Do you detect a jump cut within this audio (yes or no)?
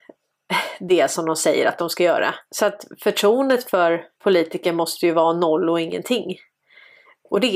yes